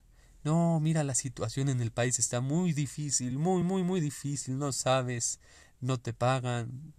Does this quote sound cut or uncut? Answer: uncut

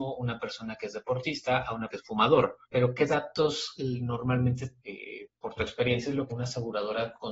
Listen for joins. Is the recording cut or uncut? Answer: cut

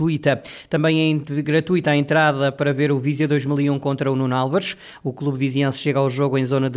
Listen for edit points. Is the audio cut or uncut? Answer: uncut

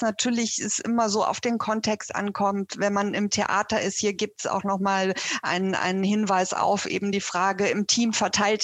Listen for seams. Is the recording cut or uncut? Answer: uncut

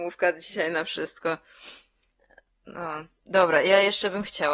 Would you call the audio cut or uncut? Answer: uncut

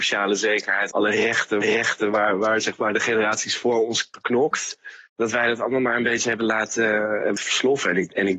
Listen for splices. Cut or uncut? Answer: cut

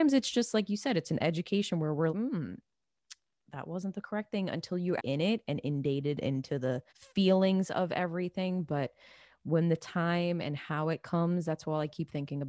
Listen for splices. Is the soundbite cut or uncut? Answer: cut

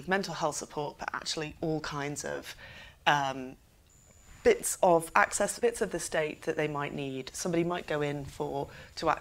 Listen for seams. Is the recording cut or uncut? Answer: cut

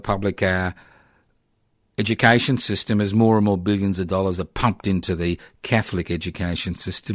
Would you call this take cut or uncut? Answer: uncut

